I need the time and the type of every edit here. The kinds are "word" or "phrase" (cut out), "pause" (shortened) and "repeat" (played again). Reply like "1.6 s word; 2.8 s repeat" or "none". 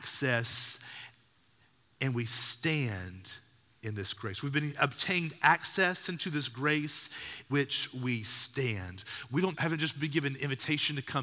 7.5 s word; 9.5 s word